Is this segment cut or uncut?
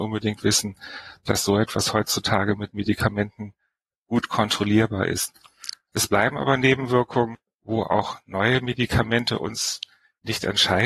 uncut